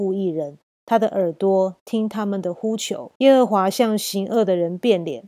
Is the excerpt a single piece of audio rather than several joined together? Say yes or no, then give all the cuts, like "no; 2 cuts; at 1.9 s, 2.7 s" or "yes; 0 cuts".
no; 1 cut; at 3.2 s